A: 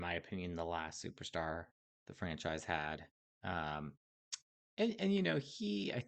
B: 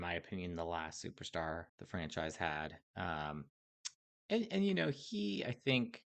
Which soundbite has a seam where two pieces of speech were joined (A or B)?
B